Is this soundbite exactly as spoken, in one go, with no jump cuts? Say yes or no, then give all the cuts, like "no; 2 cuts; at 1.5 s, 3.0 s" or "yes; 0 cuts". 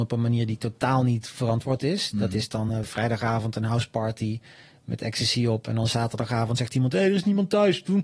yes; 0 cuts